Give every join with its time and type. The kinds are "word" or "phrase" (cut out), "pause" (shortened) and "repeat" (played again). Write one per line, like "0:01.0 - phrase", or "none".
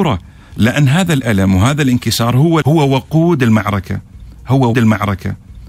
0:02.6 - word
0:04.7 - repeat